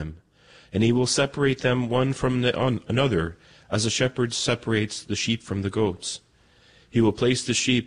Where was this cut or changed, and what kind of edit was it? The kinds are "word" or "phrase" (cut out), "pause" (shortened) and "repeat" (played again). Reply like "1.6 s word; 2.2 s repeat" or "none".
none